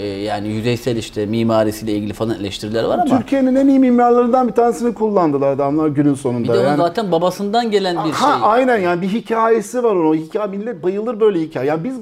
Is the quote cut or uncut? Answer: uncut